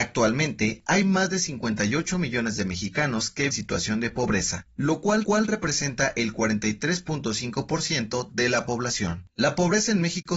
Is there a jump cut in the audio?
yes; 2 cuts; at 3.5 s, 5.2 s

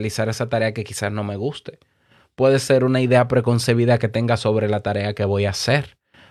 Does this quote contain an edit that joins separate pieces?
no; 0 cuts

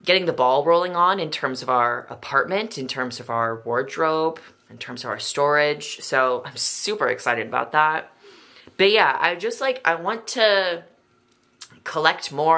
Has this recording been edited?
no; 0 cuts

